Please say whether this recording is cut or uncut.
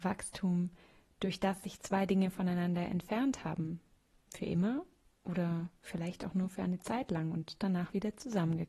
uncut